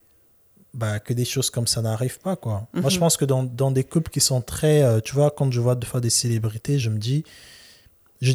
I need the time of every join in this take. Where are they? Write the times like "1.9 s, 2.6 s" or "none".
none